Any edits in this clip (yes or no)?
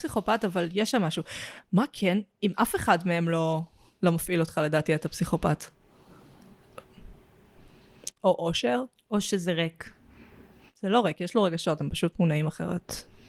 no